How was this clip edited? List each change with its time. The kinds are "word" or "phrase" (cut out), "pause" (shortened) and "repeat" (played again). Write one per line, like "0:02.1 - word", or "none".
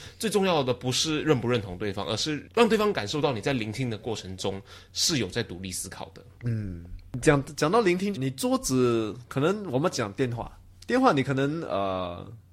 0:06.4 - pause
0:08.1 - phrase